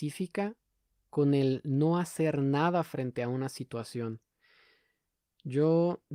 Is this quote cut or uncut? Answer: uncut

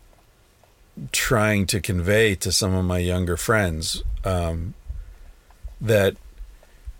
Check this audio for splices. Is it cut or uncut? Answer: uncut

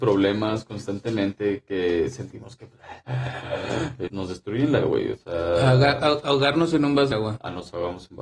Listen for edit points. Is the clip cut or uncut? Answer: cut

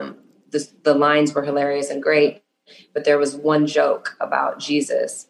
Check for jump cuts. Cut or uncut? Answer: uncut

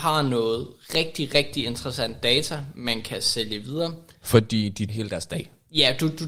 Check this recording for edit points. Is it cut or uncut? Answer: cut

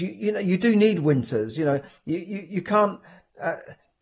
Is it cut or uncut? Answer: uncut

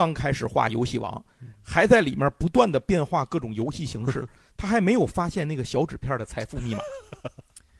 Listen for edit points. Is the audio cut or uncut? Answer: uncut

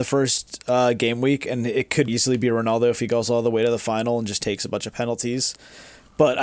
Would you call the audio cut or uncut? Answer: cut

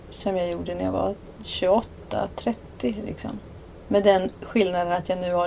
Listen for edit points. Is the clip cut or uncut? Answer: uncut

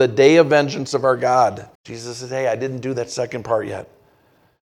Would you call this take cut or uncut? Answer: cut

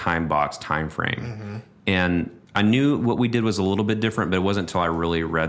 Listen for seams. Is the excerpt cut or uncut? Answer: cut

